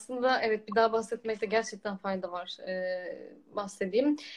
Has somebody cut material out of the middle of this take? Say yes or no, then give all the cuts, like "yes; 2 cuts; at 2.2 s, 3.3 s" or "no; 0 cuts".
no; 0 cuts